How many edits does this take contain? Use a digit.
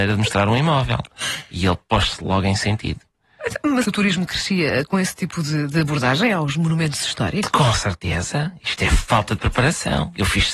1